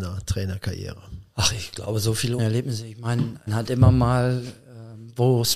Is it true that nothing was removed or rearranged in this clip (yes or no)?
no